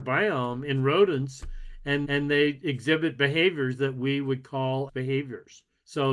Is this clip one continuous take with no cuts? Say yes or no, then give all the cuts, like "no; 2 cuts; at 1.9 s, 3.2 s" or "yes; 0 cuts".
no; 2 cuts; at 2.0 s, 4.9 s